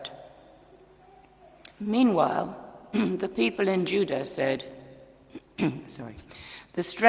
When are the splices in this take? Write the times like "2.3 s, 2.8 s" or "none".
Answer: 1.7 s